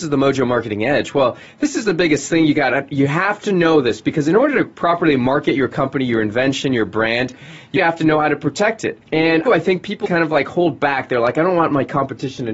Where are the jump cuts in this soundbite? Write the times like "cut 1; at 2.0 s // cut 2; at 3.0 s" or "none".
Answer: cut 1; at 7.8 s // cut 2; at 9.0 s // cut 3; at 9.5 s // cut 4; at 10.0 s